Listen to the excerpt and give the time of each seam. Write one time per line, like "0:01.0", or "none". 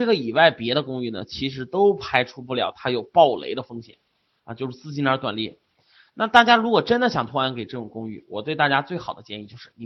none